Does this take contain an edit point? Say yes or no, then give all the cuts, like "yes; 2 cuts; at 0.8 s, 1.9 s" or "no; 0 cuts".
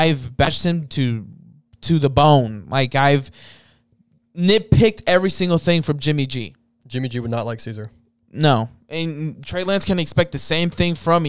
no; 0 cuts